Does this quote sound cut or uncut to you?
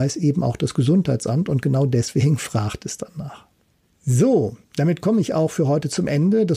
uncut